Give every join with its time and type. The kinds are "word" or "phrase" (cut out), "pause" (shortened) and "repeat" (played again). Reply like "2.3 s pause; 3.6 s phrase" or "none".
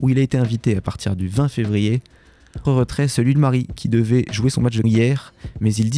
2.6 s word; 3.3 s phrase; 4.8 s word